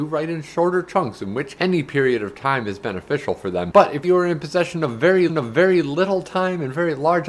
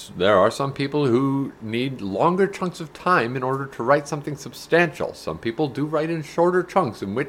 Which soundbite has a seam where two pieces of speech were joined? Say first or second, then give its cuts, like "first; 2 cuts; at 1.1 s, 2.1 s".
first; 3 cuts; at 1.6 s, 4.0 s, 5.3 s